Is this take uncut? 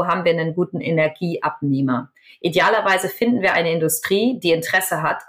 yes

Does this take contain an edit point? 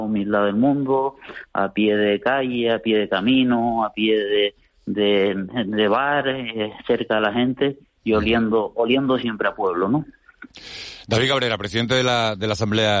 no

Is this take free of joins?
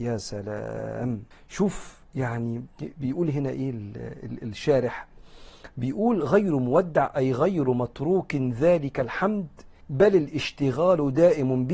no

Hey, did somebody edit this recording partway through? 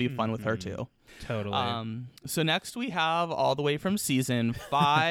yes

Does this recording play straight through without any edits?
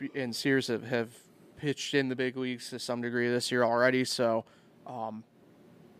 yes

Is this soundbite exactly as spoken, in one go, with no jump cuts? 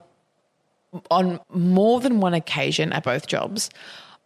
no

